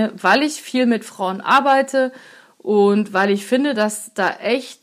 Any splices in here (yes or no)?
no